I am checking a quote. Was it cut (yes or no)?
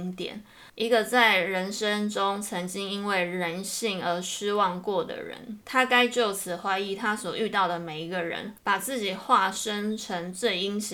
yes